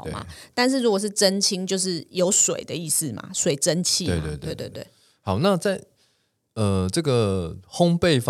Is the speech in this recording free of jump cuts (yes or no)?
yes